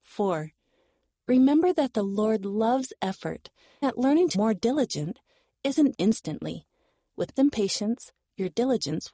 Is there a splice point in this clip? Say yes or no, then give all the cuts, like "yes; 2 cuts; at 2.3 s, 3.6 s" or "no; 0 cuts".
yes; 4 cuts; at 3.8 s, 4.3 s, 5.9 s, 7.4 s